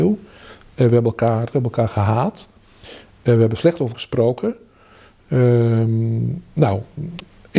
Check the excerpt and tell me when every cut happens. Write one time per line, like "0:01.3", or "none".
0:01.5
0:03.9